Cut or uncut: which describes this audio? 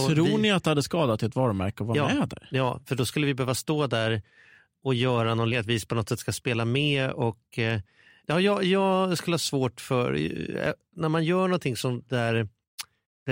cut